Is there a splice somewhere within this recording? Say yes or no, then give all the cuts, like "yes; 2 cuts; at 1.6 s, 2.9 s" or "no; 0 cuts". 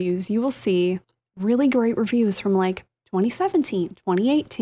no; 0 cuts